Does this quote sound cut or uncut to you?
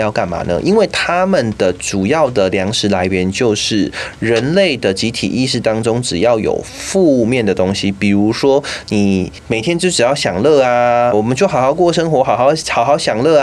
cut